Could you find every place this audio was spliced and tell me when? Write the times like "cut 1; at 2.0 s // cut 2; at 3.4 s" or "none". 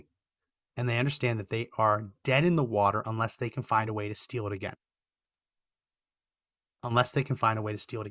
none